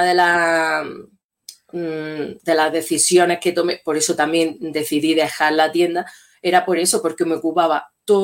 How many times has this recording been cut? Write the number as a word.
zero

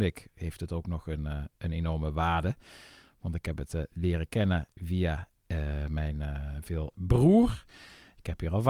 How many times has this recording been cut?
one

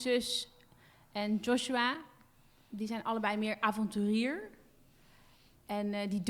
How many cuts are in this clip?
zero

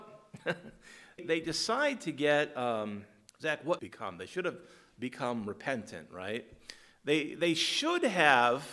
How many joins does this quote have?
three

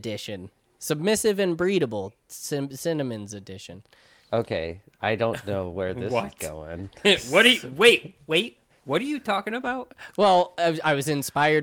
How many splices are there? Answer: zero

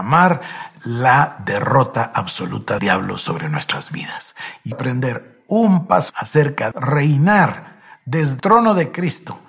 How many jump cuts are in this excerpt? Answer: five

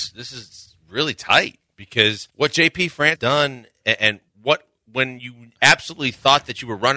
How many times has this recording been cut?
three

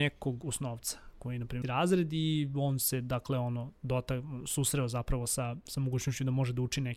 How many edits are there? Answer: one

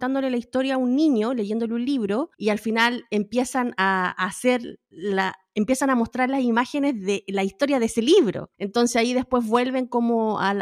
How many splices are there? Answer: two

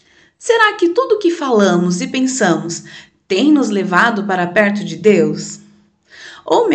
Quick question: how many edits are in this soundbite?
zero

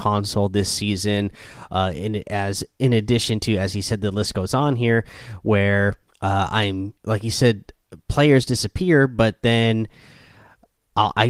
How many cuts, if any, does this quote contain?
two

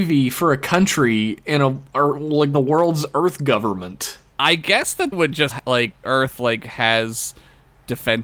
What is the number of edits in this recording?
four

